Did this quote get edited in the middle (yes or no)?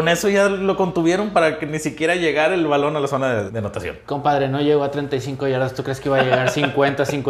yes